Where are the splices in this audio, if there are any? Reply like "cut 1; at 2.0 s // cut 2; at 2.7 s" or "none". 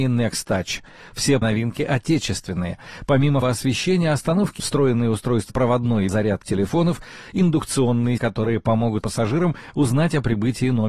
cut 1; at 1.4 s // cut 2; at 3.4 s // cut 3; at 4.6 s // cut 4; at 5.5 s // cut 5; at 6.1 s // cut 6; at 6.4 s // cut 7; at 8.2 s // cut 8; at 9.0 s